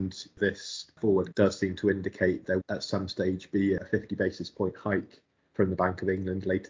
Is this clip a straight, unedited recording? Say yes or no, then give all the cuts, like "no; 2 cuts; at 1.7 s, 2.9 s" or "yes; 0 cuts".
no; 2 cuts; at 1.3 s, 2.6 s